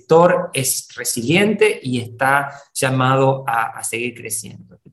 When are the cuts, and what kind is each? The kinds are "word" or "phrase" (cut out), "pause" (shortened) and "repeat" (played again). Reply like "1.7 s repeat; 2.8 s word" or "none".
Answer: none